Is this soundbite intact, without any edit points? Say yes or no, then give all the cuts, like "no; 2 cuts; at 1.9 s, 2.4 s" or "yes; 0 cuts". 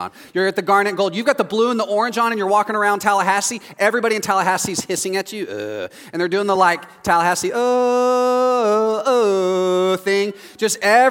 yes; 0 cuts